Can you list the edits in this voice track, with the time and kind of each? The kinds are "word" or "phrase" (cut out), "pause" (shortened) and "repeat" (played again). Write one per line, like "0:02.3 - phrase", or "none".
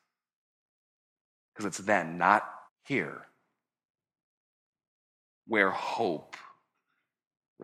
0:02.7 - pause